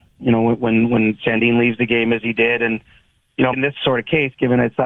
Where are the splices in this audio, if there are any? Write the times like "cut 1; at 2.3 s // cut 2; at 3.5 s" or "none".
cut 1; at 3.5 s